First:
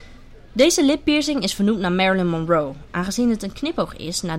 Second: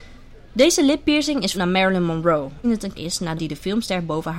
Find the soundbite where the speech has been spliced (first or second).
second